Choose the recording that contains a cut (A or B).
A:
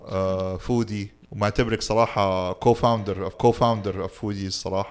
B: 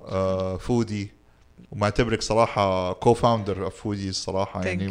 A